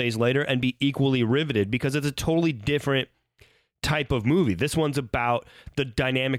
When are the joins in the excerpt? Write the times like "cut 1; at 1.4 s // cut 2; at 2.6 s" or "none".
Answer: none